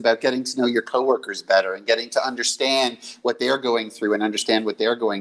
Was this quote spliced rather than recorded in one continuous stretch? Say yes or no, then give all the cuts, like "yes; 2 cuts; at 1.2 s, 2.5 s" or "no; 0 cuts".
no; 0 cuts